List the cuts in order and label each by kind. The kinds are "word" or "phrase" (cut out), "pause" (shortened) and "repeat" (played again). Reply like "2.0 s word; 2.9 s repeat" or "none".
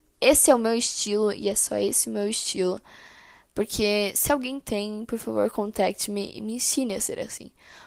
none